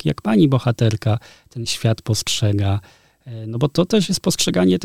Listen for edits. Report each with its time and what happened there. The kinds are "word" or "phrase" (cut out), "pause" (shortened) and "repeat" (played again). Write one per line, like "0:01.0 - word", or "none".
none